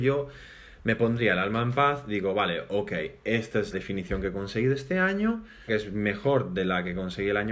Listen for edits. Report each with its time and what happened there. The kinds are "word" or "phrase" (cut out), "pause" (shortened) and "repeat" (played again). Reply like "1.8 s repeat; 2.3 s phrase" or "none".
3.7 s word; 5.7 s phrase